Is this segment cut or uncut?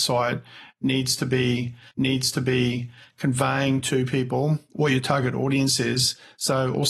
cut